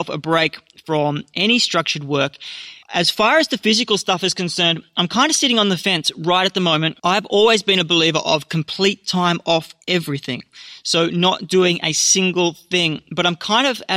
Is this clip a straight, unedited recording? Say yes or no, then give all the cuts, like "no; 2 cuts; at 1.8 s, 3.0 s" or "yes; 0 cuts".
no; 3 cuts; at 2.8 s, 7.0 s, 9.8 s